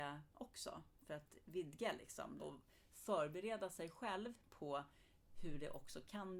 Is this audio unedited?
no; 1 cut; at 2.4 s

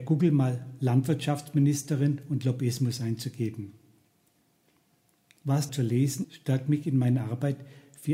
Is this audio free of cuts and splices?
no; 2 cuts; at 5.7 s, 6.2 s

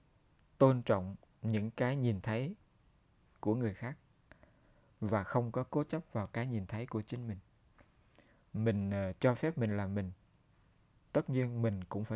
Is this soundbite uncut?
yes; 0 cuts

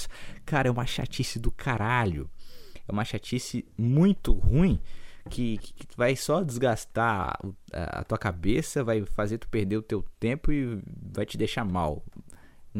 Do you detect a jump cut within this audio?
yes; 1 cut; at 5.6 s

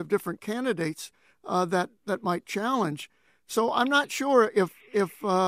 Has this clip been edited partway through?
no; 0 cuts

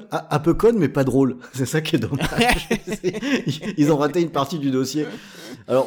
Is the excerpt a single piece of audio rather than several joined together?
yes; 0 cuts

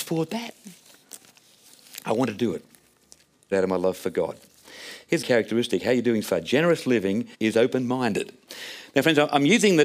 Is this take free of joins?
no; 4 cuts; at 3.5 s, 5.2 s, 6.2 s, 7.3 s

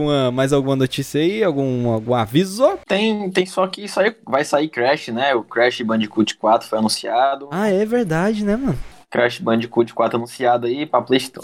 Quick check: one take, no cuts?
yes; 0 cuts

